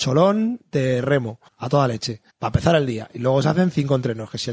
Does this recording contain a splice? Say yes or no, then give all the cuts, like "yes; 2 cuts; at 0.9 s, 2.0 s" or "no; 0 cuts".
yes; 2 cuts; at 1.5 s, 2.3 s